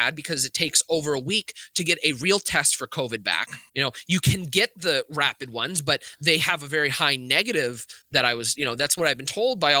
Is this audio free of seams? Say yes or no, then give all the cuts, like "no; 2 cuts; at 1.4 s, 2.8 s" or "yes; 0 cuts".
no; 1 cut; at 3.7 s